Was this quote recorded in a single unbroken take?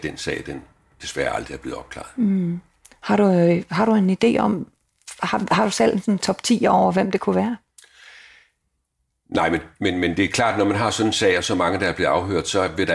yes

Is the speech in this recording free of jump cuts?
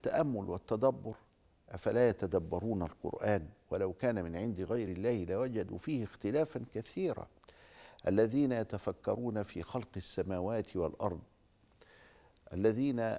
yes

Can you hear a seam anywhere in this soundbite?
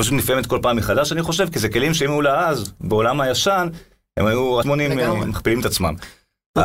yes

